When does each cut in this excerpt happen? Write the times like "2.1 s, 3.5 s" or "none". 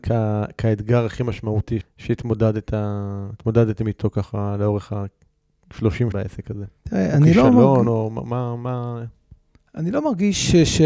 1.8 s, 6.1 s, 6.8 s